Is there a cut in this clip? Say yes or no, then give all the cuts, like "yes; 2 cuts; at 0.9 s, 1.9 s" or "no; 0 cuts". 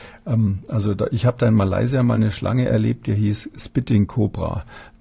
no; 0 cuts